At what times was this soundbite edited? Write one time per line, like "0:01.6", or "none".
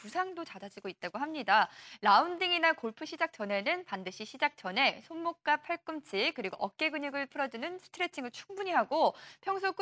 none